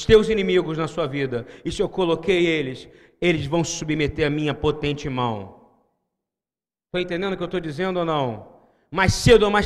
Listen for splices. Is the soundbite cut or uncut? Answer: uncut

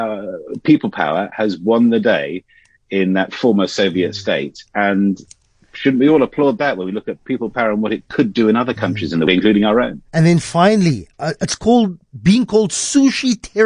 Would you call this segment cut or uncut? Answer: cut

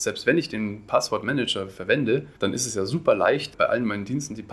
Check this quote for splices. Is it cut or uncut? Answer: cut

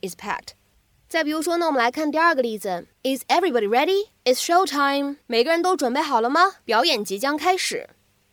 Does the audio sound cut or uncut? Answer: cut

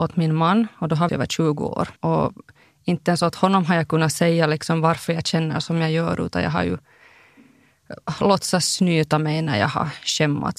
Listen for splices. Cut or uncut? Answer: cut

